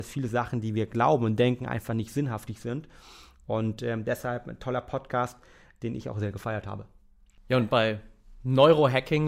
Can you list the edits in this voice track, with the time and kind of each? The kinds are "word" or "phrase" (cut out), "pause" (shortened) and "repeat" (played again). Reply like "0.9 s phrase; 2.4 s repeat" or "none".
none